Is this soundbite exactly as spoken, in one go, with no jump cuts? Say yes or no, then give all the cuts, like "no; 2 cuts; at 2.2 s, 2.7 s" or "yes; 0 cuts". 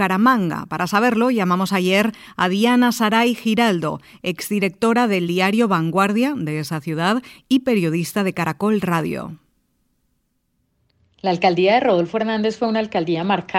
yes; 0 cuts